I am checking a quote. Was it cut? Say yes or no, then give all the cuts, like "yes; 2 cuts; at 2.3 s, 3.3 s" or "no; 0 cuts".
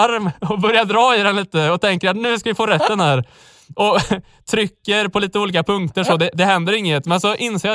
no; 0 cuts